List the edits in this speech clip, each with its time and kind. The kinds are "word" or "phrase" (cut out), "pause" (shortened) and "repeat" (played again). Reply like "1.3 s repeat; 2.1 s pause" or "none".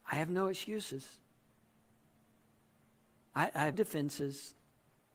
3.7 s word